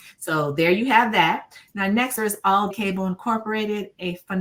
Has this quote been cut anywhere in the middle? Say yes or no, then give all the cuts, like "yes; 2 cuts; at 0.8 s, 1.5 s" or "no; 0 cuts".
yes; 2 cuts; at 2.2 s, 2.7 s